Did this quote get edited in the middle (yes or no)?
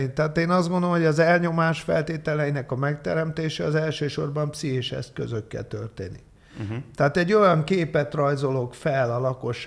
no